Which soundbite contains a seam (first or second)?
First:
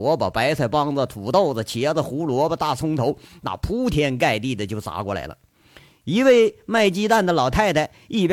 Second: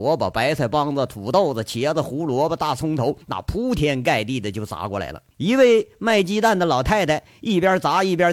second